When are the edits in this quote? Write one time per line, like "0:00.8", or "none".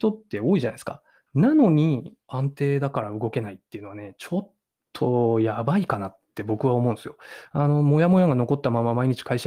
0:02.2

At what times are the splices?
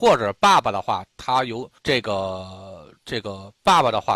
0:01.8

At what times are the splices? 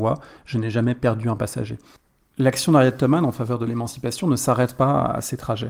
none

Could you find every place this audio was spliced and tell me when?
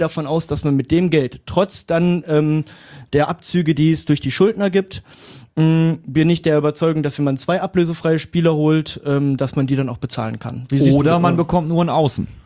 none

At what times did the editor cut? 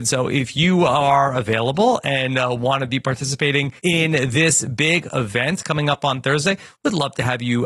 0:03.8

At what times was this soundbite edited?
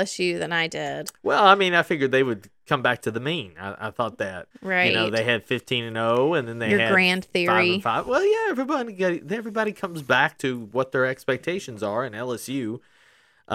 0:04.5

